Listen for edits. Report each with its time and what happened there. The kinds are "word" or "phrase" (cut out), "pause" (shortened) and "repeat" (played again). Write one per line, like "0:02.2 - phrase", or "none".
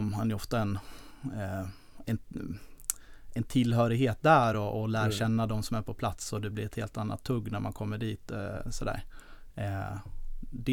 none